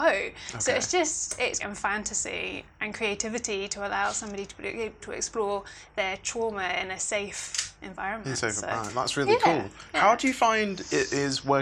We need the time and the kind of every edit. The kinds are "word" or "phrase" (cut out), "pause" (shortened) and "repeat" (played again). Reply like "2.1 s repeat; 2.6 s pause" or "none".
1.6 s phrase; 5.0 s word